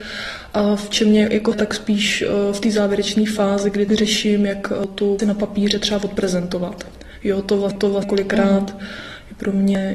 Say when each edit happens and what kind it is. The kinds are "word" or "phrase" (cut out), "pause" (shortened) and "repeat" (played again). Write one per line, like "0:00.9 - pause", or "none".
0:01.5 - word
0:03.9 - word
0:05.2 - word
0:07.8 - repeat

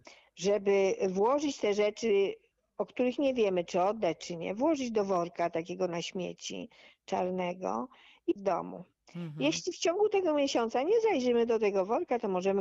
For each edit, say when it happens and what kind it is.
0:08.4 - phrase

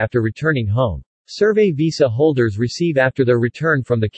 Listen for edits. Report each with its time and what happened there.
0:01.1 - pause

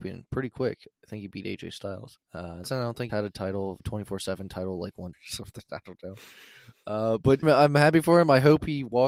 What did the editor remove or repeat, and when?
0:02.2 - pause
0:02.6 - phrase
0:03.1 - word
0:03.8 - phrase
0:05.1 - word
0:07.4 - word

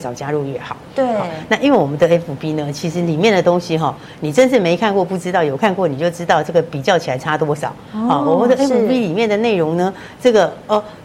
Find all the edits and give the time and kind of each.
none

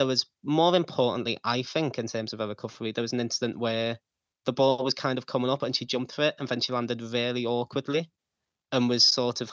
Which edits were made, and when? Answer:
none

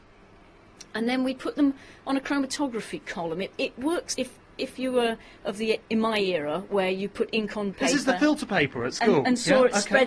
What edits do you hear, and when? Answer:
0:04.1 - word
0:07.7 - word

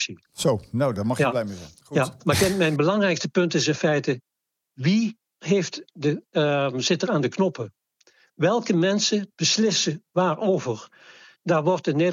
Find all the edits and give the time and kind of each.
none

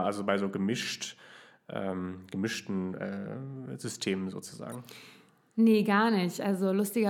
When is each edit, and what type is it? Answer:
none

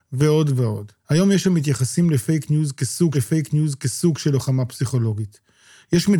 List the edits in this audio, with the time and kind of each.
0:01.0 - pause
0:03.1 - repeat

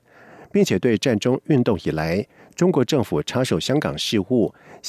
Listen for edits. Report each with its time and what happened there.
none

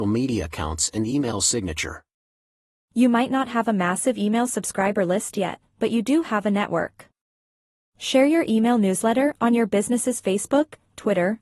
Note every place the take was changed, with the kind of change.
none

